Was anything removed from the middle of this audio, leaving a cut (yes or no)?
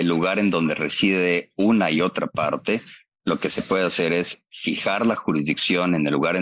no